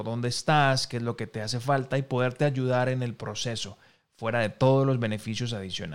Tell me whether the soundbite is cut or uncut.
uncut